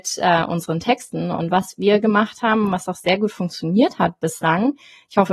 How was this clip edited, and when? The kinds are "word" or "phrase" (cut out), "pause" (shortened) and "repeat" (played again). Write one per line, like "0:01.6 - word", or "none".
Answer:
none